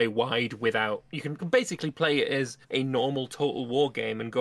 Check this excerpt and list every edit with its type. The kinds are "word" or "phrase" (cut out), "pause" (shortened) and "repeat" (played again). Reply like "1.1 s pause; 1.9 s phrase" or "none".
1.4 s word; 2.6 s pause